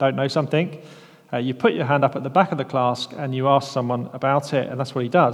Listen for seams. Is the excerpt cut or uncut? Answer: uncut